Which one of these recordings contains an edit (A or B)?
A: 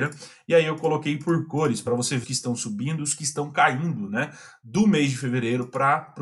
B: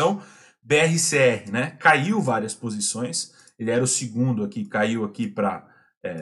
A